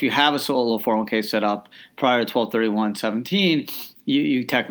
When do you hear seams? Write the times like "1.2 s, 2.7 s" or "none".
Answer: none